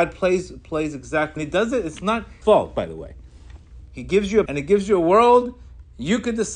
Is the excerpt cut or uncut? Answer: cut